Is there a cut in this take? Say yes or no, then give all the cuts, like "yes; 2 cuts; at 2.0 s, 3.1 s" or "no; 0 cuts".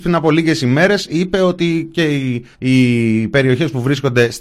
yes; 1 cut; at 2.5 s